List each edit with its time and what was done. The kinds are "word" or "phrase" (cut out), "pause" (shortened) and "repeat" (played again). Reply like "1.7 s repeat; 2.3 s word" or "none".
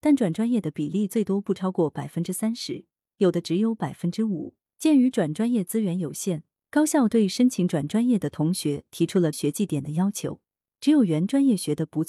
9.3 s word